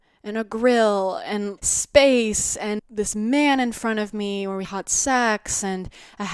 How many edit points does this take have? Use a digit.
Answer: 3